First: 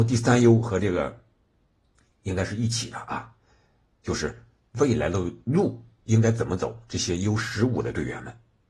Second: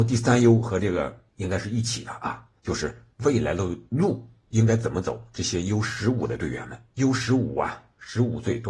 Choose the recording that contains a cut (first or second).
second